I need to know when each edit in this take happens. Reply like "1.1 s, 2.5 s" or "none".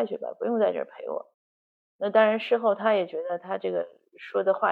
1.3 s

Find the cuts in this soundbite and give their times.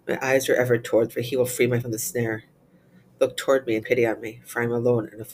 1.1 s, 1.8 s, 3.8 s

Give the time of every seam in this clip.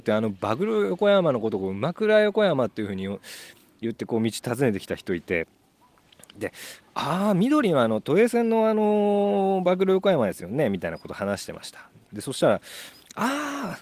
none

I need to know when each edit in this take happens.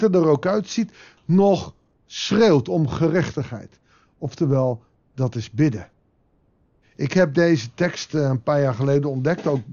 none

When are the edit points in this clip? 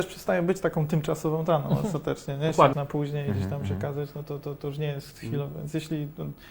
2.7 s, 4.4 s

